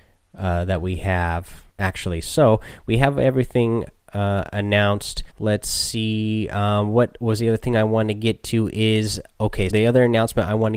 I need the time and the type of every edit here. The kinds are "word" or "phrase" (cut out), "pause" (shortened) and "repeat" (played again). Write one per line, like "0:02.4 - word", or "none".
0:01.7 - pause
0:05.3 - pause
0:09.7 - word